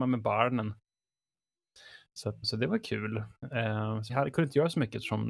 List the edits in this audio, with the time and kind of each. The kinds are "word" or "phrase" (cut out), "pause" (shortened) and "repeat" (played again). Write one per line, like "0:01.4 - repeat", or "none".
0:02.4 - word
0:04.1 - word